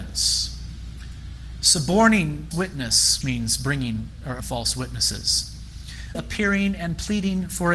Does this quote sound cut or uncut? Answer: cut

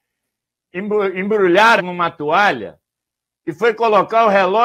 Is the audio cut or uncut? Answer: cut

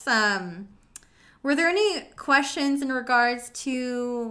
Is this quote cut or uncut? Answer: uncut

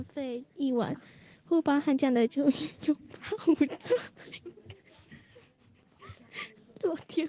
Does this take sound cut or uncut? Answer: uncut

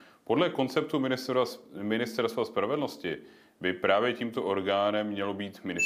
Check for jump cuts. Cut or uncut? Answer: uncut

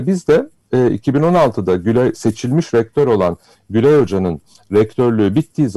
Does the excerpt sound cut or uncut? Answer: uncut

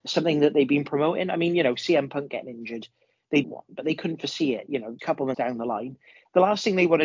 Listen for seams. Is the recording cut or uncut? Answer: cut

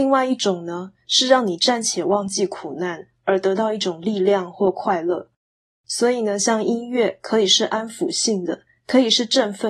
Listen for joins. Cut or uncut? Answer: uncut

